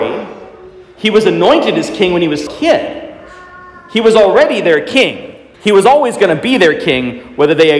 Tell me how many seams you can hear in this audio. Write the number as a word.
two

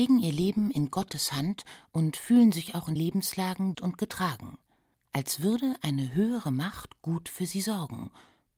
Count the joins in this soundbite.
three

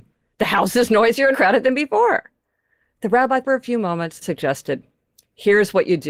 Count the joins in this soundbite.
three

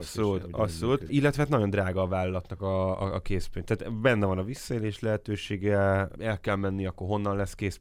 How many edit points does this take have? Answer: zero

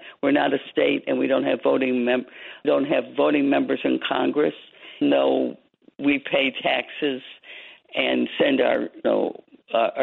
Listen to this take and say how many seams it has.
three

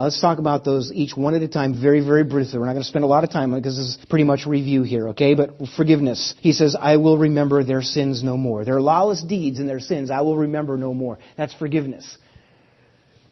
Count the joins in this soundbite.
two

